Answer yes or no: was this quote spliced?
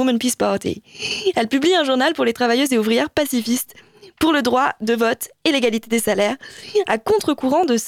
no